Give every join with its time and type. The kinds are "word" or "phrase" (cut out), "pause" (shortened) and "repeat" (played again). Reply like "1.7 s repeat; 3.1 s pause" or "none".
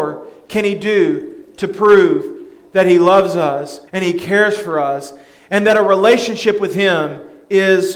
3.9 s pause